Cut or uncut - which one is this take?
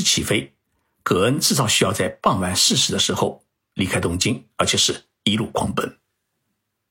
uncut